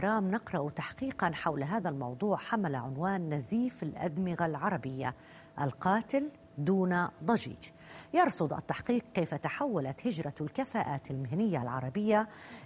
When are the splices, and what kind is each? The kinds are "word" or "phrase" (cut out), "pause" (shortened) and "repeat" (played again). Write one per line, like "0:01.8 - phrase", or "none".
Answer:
none

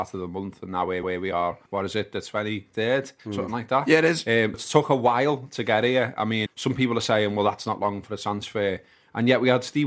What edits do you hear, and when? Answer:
0:01.0 - repeat
0:01.7 - pause
0:03.2 - pause
0:04.5 - word
0:06.5 - word

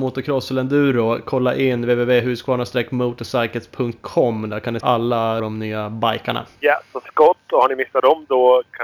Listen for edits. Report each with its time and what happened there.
0:04.8 - word
0:05.4 - phrase
0:06.5 - pause
0:07.1 - word

